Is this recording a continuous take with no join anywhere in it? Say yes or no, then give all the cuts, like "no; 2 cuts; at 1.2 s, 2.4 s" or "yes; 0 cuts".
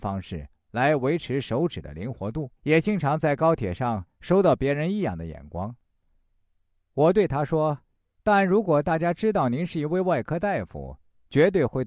no; 2 cuts; at 2.6 s, 7.8 s